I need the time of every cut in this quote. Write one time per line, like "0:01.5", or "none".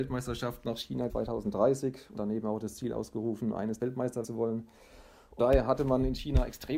0:01.1
0:02.2
0:03.8
0:04.2
0:05.4